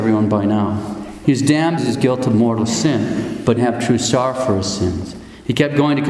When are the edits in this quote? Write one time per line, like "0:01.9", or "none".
0:01.8
0:03.6

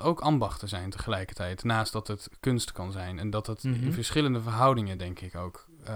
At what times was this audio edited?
none

